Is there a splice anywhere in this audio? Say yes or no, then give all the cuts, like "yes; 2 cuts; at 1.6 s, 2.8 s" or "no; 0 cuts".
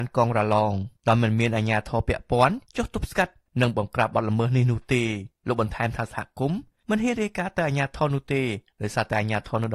yes; 2 cuts; at 1.0 s, 5.4 s